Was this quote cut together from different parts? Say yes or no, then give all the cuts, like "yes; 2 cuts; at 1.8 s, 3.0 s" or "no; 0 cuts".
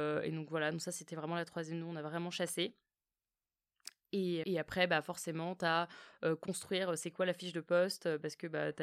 yes; 1 cut; at 4.4 s